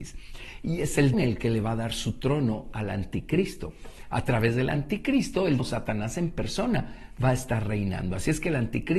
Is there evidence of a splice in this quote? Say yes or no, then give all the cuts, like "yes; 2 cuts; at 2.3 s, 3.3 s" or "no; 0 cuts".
yes; 2 cuts; at 1.1 s, 5.6 s